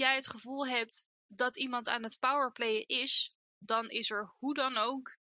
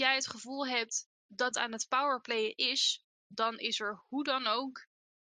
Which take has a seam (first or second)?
second